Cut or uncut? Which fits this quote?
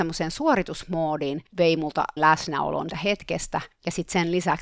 cut